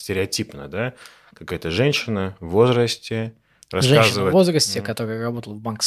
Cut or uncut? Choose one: uncut